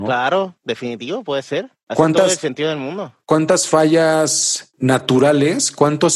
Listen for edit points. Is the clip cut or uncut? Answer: uncut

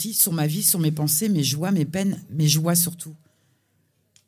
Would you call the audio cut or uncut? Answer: uncut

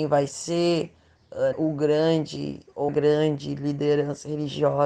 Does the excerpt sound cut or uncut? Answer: cut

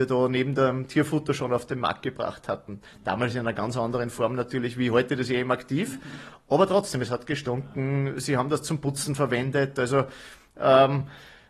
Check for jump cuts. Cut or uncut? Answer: uncut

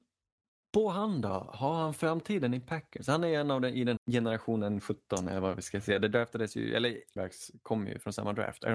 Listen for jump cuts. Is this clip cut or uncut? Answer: cut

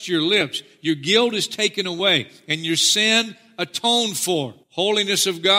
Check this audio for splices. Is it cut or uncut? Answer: cut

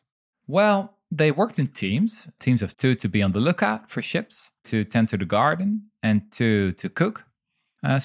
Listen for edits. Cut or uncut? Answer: cut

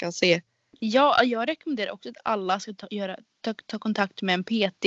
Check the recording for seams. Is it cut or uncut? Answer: uncut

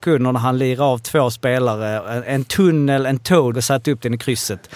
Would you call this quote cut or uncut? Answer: cut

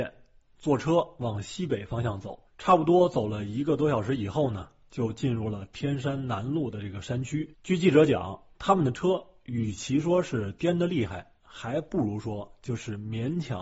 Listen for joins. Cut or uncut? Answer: cut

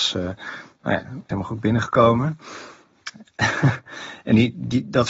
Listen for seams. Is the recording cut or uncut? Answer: cut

